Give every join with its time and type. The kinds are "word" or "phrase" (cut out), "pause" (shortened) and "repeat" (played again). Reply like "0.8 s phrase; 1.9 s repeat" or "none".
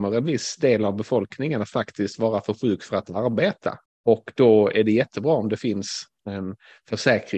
3.9 s pause

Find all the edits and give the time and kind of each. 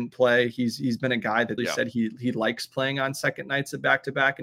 1.6 s word

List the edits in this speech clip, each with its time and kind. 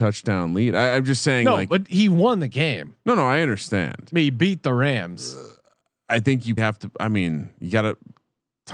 6.6 s word

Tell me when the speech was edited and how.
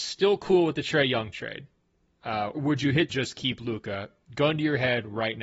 2.5 s word; 3.1 s phrase

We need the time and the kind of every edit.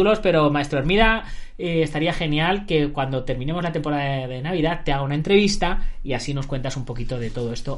none

